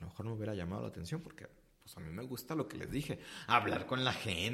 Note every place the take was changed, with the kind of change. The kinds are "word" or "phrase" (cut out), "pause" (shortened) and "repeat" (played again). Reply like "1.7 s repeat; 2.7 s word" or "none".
none